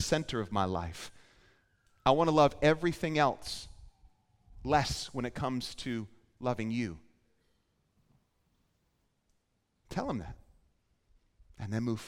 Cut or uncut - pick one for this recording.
uncut